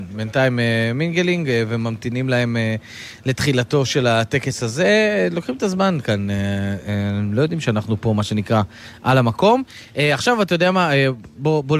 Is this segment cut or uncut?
uncut